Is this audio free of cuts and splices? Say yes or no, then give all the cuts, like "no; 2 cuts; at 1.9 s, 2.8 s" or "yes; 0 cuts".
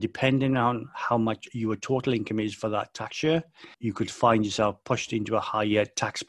no; 1 cut; at 3.7 s